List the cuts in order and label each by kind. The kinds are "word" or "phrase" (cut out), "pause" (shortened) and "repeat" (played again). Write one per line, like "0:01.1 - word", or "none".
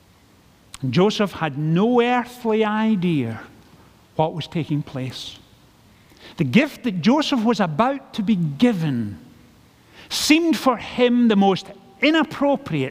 none